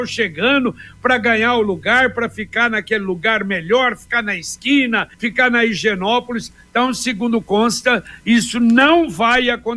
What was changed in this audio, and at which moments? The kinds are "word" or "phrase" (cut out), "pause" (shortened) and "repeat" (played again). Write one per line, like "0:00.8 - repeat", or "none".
0:05.1 - pause